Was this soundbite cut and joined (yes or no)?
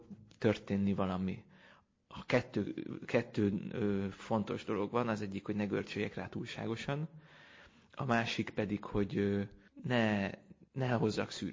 no